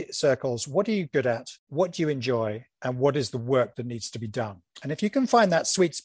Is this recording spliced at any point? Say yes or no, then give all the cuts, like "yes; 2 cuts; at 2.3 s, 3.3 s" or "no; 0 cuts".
yes; 2 cuts; at 1.6 s, 4.7 s